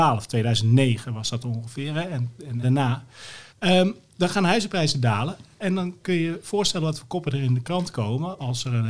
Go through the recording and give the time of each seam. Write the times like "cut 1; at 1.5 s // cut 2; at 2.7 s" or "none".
cut 1; at 2.6 s // cut 2; at 3.5 s